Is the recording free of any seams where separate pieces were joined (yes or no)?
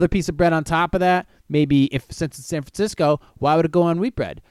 yes